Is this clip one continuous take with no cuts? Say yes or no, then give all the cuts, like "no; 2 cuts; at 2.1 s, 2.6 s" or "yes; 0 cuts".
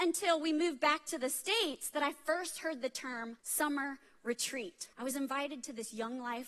no; 2 cuts; at 3.4 s, 4.9 s